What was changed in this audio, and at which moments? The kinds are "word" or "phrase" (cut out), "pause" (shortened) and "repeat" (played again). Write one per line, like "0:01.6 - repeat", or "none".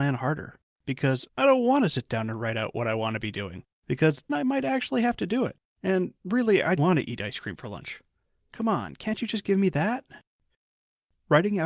0:01.3 - word
0:04.3 - word
0:06.2 - pause
0:06.8 - word